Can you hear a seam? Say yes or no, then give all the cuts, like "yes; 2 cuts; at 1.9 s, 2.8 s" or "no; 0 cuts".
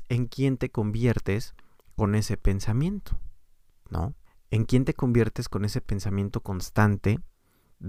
yes; 1 cut; at 4.3 s